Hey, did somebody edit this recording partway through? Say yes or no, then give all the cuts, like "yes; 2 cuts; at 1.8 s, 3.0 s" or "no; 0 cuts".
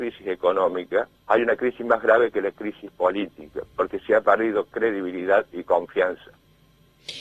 yes; 1 cut; at 1.2 s